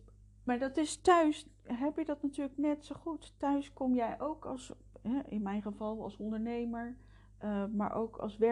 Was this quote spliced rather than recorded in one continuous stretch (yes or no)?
no